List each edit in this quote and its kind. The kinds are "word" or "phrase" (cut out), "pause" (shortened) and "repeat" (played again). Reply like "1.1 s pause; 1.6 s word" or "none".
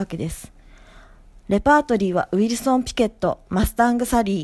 3.4 s pause

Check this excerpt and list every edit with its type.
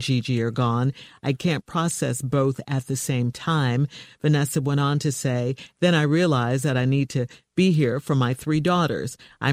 none

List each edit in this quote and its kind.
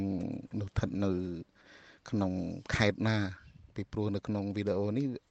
none

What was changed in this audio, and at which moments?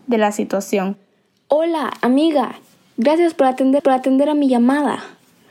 3.8 s repeat

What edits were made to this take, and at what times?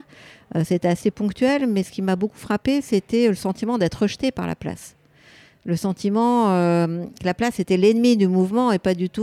none

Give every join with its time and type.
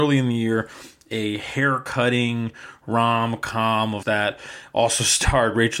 4.0 s word

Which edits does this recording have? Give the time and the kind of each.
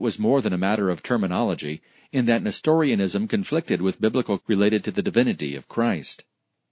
4.4 s word

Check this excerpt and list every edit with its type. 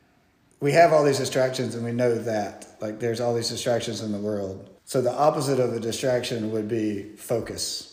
4.8 s pause

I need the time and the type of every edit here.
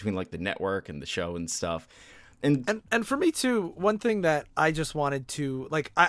none

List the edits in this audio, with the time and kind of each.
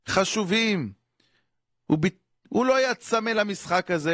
none

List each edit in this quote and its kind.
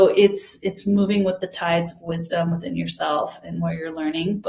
none

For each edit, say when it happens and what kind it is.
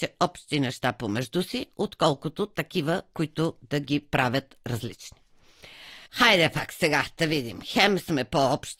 6.1 s pause

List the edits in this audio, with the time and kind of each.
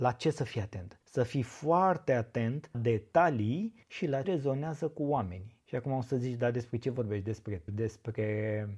1.0 s pause; 2.7 s word; 3.8 s pause; 4.2 s word; 5.6 s pause; 7.7 s word

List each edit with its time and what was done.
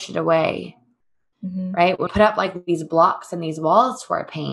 2.1 s word

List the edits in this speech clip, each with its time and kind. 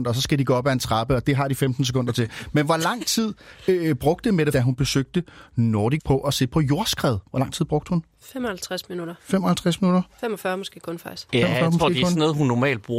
4.5 s phrase; 6.0 s word

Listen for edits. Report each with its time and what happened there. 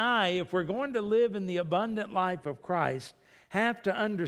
none

